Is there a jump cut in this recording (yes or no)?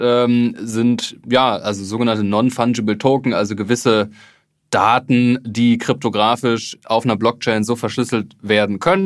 no